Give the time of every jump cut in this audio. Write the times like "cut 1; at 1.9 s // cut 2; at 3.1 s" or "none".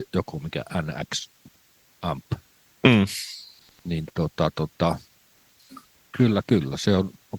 none